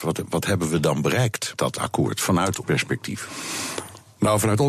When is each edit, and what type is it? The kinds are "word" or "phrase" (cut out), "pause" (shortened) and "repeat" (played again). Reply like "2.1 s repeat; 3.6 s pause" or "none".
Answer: 1.6 s word; 2.6 s word